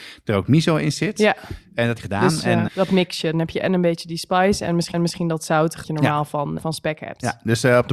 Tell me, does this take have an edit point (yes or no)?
yes